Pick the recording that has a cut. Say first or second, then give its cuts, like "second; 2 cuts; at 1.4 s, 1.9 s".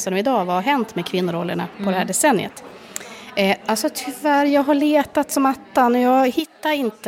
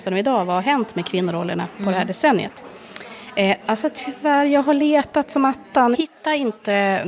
second; 1 cut; at 5.9 s